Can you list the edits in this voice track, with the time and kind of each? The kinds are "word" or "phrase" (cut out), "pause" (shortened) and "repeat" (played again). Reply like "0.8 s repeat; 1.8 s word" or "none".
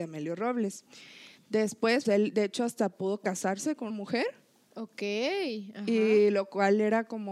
2.0 s word; 3.9 s word